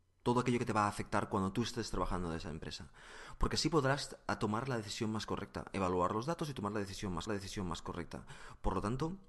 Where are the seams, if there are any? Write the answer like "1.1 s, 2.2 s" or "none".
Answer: 7.3 s